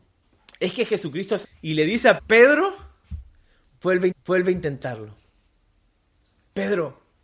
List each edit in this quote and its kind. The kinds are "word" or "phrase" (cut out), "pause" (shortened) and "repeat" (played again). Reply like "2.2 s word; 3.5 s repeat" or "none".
1.4 s word; 2.2 s word; 4.1 s repeat